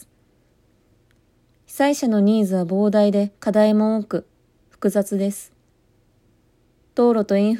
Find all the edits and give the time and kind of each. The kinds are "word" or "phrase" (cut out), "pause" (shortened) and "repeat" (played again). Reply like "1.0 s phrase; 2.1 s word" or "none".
3.4 s pause